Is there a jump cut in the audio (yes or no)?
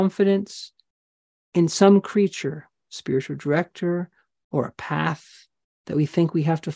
no